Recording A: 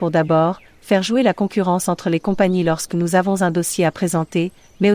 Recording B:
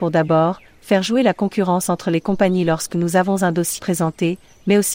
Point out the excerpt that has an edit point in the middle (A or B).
B